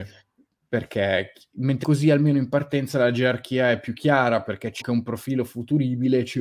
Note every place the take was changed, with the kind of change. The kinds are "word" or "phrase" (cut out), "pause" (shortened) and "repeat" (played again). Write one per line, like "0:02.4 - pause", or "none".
0:01.8 - word
0:04.8 - word